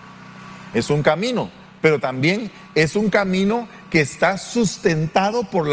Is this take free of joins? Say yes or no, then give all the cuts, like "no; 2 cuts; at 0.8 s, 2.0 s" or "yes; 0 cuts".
yes; 0 cuts